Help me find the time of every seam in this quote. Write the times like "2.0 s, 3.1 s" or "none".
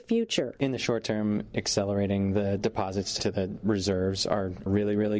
none